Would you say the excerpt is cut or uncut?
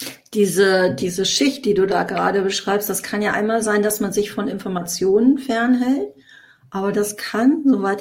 uncut